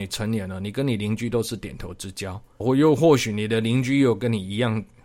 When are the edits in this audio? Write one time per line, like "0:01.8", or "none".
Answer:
0:02.6